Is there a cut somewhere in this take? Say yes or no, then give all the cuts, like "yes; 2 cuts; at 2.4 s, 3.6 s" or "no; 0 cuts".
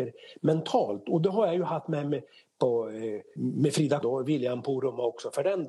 yes; 2 cuts; at 3.4 s, 4.0 s